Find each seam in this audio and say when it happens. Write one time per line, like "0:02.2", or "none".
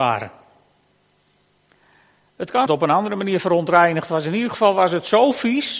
0:02.7